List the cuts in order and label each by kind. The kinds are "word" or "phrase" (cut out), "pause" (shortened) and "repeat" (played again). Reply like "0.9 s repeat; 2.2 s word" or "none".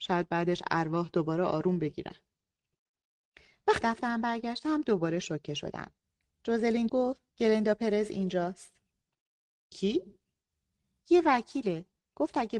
3.8 s word; 6.9 s word; 7.3 s pause